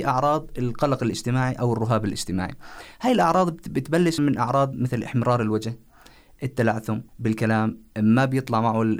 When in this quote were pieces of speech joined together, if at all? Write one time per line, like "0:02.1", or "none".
0:04.2
0:07.1